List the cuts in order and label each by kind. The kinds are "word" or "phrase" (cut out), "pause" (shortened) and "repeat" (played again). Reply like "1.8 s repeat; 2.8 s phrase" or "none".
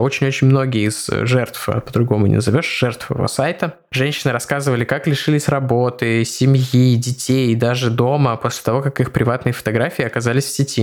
none